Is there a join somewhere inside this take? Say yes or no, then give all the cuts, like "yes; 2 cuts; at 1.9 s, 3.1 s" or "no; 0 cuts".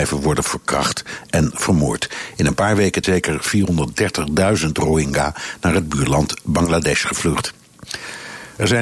yes; 1 cut; at 3.0 s